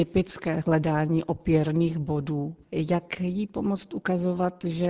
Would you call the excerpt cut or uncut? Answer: cut